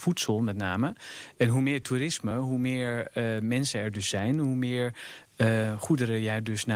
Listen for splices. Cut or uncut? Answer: uncut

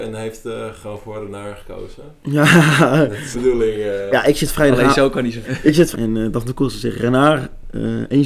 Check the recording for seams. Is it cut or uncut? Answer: cut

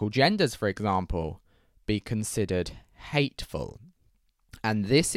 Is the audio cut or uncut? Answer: uncut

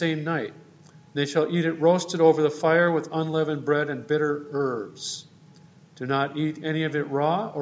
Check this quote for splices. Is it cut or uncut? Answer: uncut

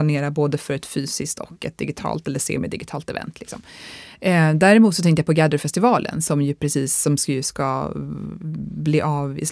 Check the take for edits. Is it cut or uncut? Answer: uncut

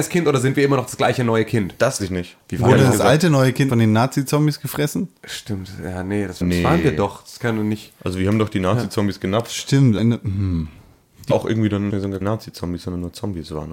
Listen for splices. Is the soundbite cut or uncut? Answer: cut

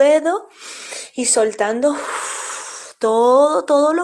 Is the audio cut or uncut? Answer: uncut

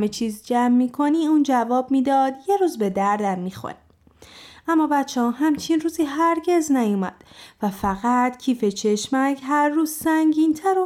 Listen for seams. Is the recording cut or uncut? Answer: uncut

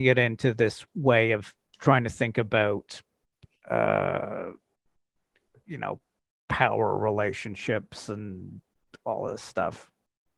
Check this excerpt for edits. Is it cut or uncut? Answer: uncut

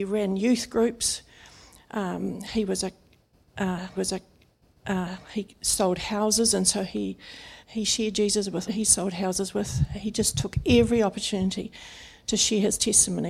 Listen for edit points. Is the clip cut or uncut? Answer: cut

